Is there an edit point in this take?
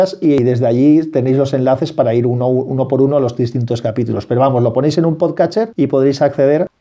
no; 0 cuts

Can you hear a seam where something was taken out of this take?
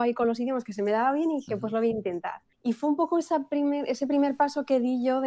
yes; 1 cut; at 2.5 s

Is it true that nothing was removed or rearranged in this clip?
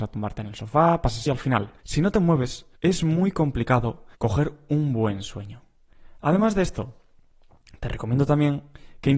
no; 4 cuts; at 1.3 s, 1.8 s, 2.8 s, 4.1 s

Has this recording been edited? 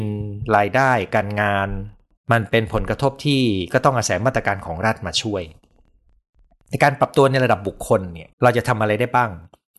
yes; 2 cuts; at 2.2 s, 8.3 s

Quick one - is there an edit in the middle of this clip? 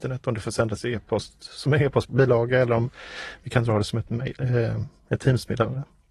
no; 0 cuts

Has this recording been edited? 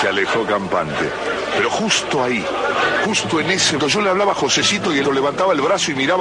yes; 2 cuts; at 3.8 s, 5.0 s

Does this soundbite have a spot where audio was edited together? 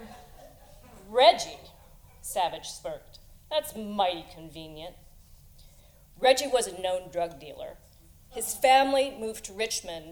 no; 0 cuts

